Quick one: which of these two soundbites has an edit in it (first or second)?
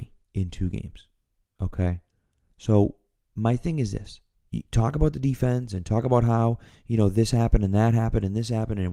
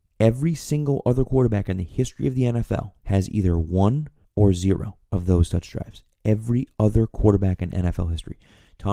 second